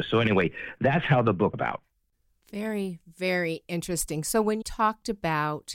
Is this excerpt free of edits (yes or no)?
no